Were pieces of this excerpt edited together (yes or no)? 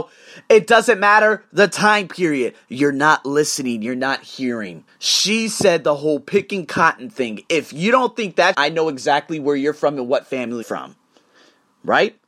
yes